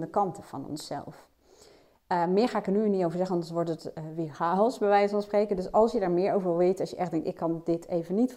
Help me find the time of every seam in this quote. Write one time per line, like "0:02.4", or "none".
none

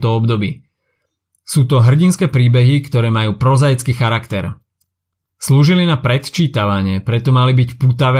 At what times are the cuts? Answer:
none

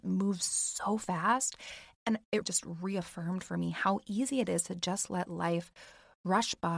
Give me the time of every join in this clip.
0:02.4

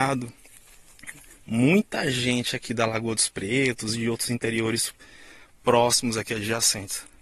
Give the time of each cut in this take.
none

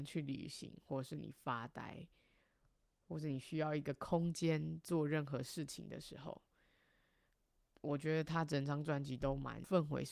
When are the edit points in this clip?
none

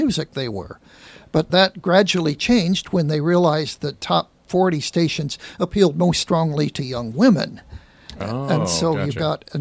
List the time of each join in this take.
0:01.5

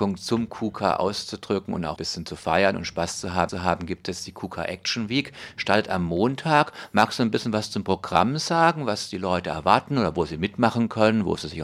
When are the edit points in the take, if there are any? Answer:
0:02.0
0:03.5

